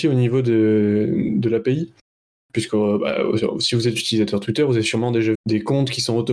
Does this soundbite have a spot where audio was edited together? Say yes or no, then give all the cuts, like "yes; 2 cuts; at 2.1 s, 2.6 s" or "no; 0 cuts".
yes; 1 cut; at 5.3 s